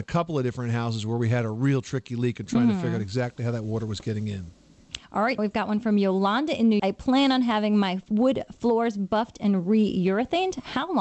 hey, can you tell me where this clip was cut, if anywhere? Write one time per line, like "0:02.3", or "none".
0:05.4
0:06.8

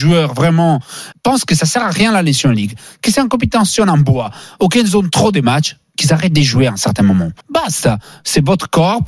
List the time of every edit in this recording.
0:01.1
0:07.4

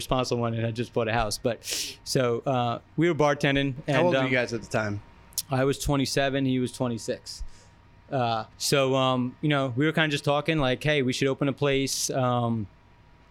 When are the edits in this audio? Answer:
0:08.5

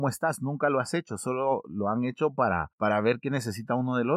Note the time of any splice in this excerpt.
none

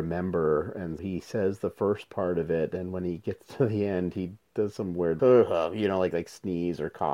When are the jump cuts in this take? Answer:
0:01.0
0:05.2

